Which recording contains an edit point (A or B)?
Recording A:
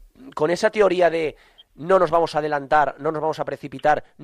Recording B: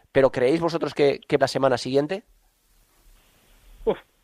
B